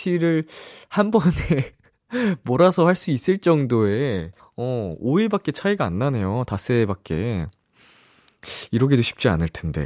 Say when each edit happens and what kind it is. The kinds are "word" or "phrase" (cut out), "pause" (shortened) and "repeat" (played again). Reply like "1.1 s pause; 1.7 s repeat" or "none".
4.4 s pause